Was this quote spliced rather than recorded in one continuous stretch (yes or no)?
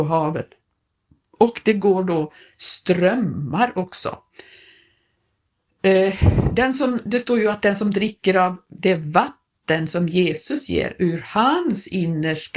no